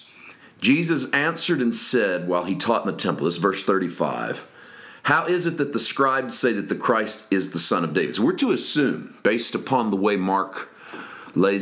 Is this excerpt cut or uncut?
uncut